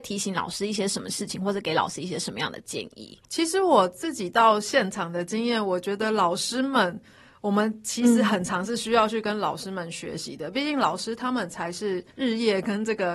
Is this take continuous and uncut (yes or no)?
no